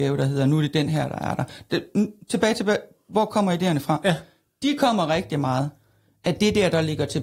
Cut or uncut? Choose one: uncut